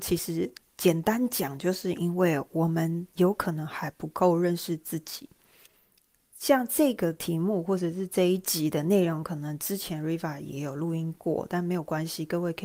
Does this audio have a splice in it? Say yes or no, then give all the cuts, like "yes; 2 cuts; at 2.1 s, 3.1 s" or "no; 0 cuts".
no; 0 cuts